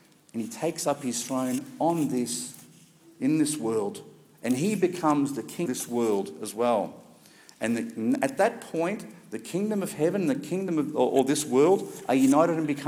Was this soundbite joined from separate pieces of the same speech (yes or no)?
yes